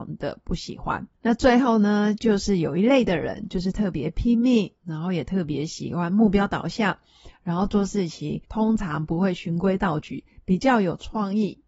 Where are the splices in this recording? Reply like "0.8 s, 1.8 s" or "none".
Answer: 1.1 s, 8.4 s